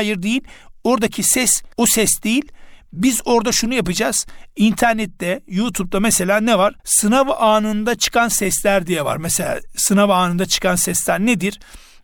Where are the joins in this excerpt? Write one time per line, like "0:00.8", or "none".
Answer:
0:01.7
0:06.8